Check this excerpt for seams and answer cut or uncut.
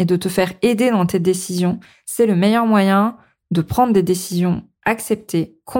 uncut